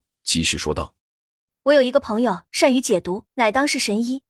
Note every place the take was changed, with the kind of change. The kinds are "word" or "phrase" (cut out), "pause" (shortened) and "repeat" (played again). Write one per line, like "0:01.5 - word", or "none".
0:01.0 - pause
0:03.3 - pause